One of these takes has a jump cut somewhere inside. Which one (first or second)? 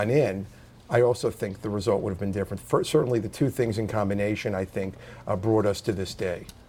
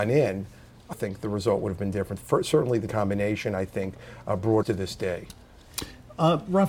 second